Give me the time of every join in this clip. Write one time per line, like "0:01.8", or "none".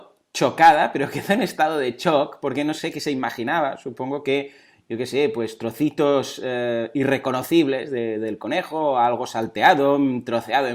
none